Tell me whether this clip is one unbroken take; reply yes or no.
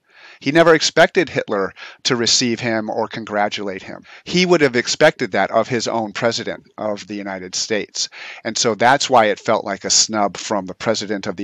yes